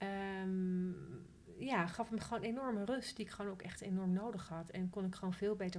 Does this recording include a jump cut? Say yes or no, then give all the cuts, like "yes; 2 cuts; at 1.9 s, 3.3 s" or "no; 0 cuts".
no; 0 cuts